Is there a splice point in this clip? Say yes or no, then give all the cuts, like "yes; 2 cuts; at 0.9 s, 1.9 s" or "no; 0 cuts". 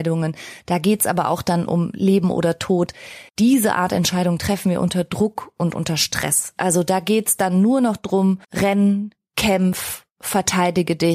yes; 2 cuts; at 3.3 s, 8.4 s